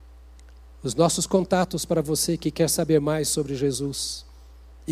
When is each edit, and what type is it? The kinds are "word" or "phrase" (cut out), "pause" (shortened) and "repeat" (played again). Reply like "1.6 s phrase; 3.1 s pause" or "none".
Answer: none